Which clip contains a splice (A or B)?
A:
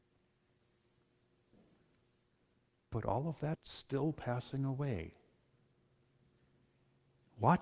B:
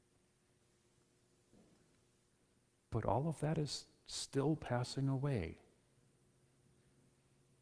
A